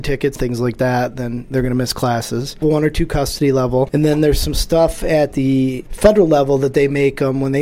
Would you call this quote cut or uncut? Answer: uncut